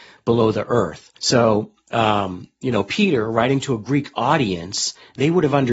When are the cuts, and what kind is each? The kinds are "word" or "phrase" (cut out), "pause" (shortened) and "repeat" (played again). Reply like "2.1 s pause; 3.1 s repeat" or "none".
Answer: 1.2 s pause